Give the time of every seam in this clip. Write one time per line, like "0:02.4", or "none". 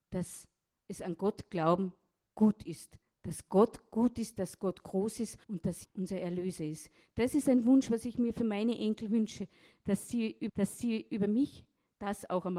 0:05.4
0:05.8
0:10.5

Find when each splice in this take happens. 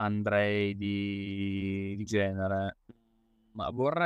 0:02.1

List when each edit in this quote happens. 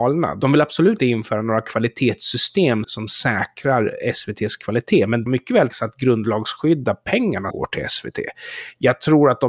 0:01.0
0:02.8
0:05.3
0:05.7
0:07.5

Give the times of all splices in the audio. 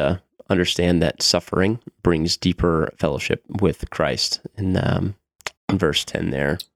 0:05.6

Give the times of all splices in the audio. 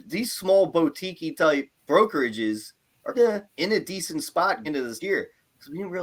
0:01.8
0:03.1
0:03.5
0:04.6
0:05.0

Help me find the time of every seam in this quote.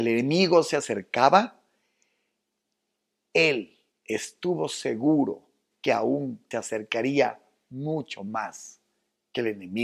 0:03.9
0:05.7
0:06.5

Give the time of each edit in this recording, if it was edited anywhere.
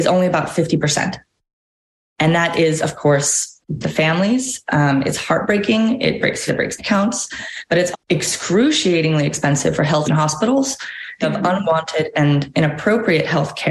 0:03.8
0:06.5
0:06.8
0:07.9
0:10.0
0:11.2

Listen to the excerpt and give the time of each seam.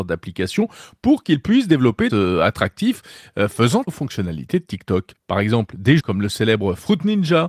0:02.1
0:03.9
0:05.1
0:06.0

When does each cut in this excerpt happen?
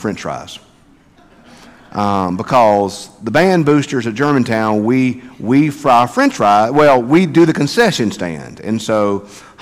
none

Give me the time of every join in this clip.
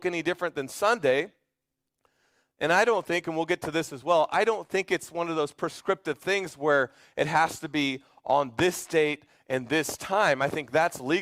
none

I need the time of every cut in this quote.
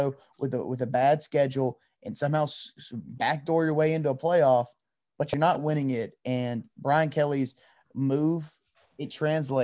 none

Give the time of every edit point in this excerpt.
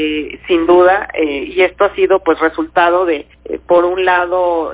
0:03.3

